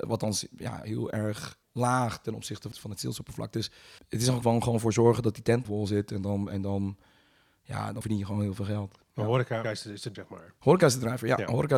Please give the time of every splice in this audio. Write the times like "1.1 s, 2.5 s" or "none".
1.6 s, 2.7 s, 4.0 s, 4.4 s, 5.6 s, 8.0 s, 9.6 s, 10.1 s